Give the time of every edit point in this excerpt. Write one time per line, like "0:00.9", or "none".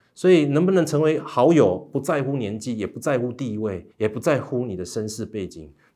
0:03.9